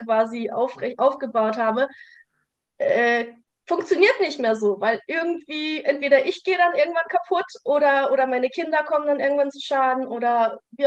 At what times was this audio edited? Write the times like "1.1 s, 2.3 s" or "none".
none